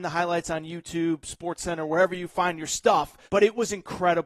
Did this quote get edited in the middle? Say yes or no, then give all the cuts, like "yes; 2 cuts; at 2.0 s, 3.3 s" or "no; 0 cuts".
yes; 1 cut; at 3.3 s